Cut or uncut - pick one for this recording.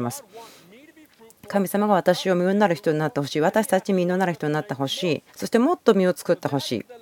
cut